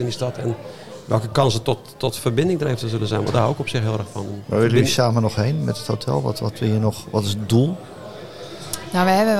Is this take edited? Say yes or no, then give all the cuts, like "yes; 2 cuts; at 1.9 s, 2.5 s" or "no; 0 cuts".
no; 0 cuts